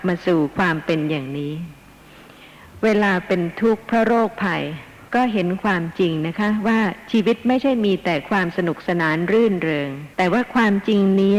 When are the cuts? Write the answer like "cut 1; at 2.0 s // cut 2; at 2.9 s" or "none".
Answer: cut 1; at 5.1 s // cut 2; at 10.1 s